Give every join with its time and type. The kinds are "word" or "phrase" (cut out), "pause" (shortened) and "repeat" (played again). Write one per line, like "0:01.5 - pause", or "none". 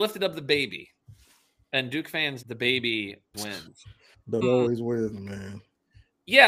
0:02.4 - word
0:03.3 - word
0:04.4 - word